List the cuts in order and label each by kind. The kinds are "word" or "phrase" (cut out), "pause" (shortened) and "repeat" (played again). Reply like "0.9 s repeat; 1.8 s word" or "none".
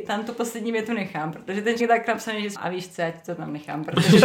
1.8 s word; 2.5 s word